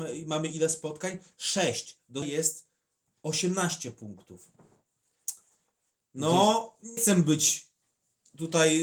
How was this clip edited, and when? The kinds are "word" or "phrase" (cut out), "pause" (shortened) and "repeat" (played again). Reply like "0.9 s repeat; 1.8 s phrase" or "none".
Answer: 2.2 s word; 7.0 s word